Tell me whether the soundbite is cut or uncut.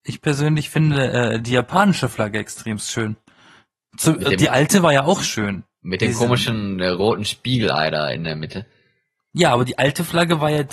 uncut